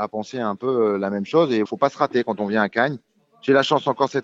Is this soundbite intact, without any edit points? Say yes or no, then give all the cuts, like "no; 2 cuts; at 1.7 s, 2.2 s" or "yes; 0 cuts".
no; 1 cut; at 1.6 s